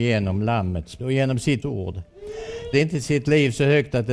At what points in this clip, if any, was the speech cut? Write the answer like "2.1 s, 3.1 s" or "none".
1.0 s, 1.6 s, 2.7 s